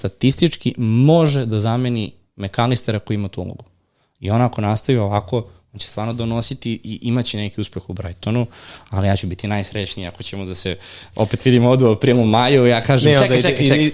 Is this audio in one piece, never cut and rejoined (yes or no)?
yes